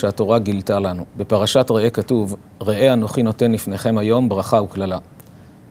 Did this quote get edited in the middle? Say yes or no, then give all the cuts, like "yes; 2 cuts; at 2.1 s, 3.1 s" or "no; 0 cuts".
yes; 2 cuts; at 1.1 s, 2.4 s